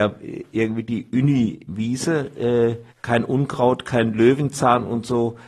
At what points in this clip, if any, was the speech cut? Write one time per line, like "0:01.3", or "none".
0:02.9